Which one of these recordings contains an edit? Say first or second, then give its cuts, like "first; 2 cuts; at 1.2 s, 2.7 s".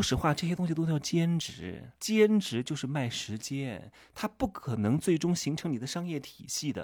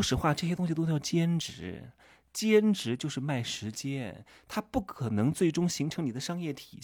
first; 1 cut; at 2.0 s